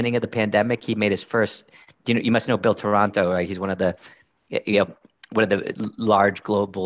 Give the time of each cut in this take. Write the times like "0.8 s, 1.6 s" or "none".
none